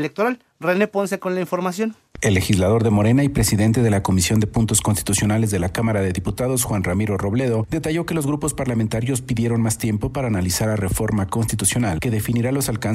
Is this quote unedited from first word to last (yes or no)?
yes